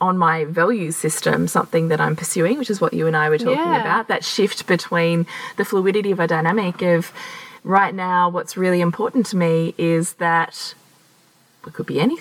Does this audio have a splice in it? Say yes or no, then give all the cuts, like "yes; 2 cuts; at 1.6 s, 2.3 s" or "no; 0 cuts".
no; 0 cuts